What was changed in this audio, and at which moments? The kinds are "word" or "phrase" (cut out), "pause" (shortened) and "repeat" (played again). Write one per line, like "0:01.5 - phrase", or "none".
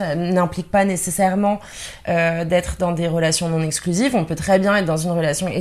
none